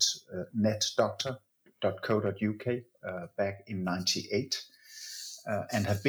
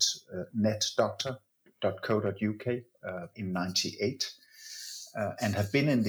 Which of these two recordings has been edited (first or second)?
second